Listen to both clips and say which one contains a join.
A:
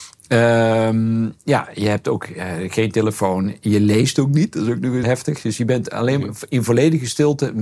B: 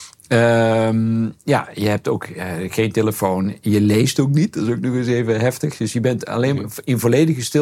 A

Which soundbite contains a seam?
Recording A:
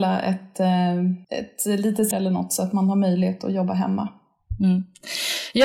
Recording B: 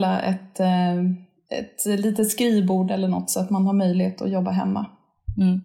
A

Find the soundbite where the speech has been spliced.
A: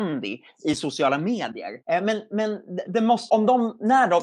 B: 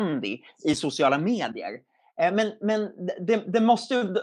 A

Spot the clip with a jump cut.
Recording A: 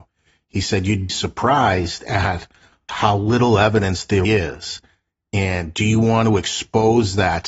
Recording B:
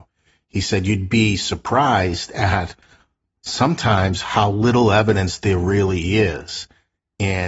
A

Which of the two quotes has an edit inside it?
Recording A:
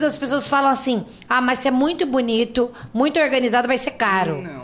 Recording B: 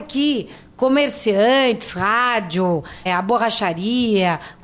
B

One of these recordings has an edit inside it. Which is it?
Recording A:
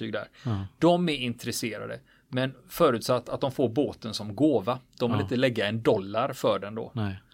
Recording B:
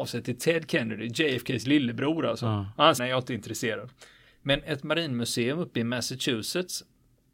B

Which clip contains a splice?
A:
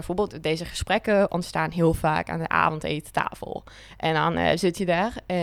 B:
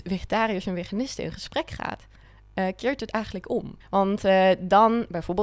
B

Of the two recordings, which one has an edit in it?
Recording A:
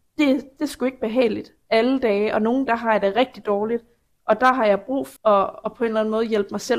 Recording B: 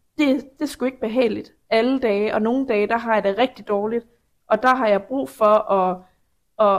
A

